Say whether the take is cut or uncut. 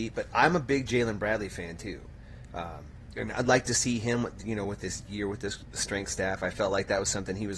uncut